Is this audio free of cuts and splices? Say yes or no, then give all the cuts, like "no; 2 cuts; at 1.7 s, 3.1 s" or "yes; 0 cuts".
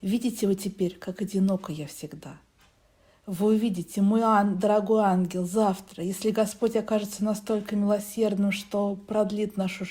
yes; 0 cuts